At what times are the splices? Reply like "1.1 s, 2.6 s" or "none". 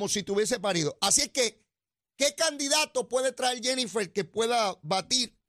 none